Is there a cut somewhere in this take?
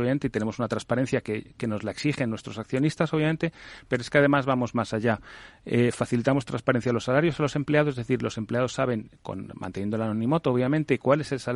no; 0 cuts

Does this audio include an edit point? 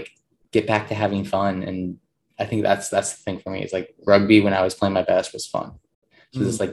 no; 0 cuts

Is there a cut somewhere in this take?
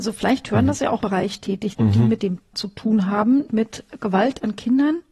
yes; 4 cuts; at 1.0 s, 1.7 s, 2.5 s, 3.5 s

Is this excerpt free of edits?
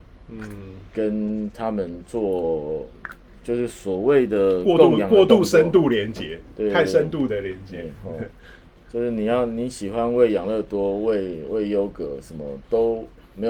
yes; 0 cuts

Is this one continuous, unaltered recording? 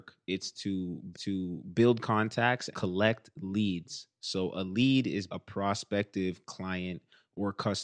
no; 3 cuts; at 1.1 s, 2.7 s, 5.3 s

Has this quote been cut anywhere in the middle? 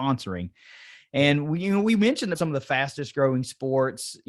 yes; 1 cut; at 2.3 s

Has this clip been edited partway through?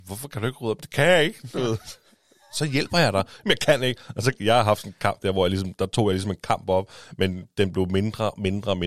no; 0 cuts

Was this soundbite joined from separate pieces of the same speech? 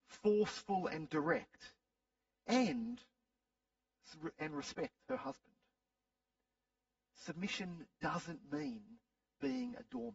no; 0 cuts

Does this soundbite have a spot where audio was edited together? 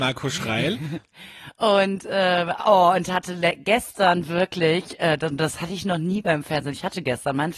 no; 0 cuts

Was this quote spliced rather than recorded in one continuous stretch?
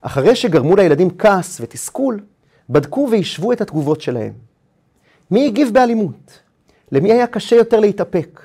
no; 0 cuts

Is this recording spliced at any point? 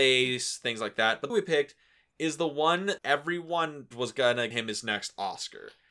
yes; 4 cuts; at 1.3 s, 3.0 s, 3.9 s, 4.5 s

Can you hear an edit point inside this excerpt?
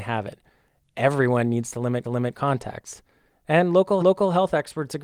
yes; 2 cuts; at 2.0 s, 4.0 s

